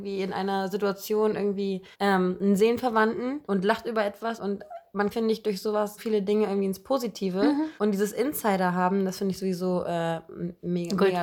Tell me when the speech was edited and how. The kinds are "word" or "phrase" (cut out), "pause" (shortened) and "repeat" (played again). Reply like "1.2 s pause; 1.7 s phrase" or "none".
1.9 s pause; 3.4 s pause; 4.4 s word; 5.1 s phrase; 6.0 s word; 7.8 s pause